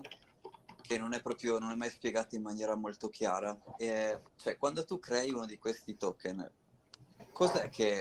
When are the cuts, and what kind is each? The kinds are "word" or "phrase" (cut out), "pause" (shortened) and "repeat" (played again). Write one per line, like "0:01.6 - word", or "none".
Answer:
0:04.3 - pause